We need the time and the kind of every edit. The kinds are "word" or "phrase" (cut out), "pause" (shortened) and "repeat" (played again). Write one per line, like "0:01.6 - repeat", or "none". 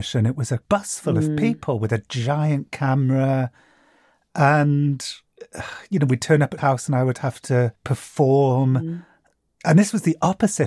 0:06.6 - word